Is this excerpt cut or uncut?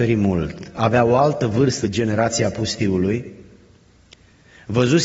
cut